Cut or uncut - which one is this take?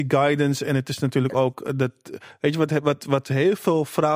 uncut